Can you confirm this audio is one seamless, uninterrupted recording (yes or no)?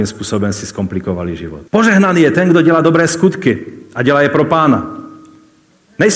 no